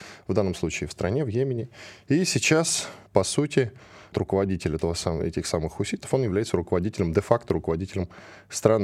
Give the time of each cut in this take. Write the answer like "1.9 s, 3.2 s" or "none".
3.1 s, 4.1 s